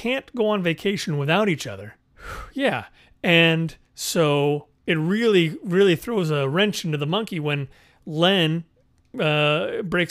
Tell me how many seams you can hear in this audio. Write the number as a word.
one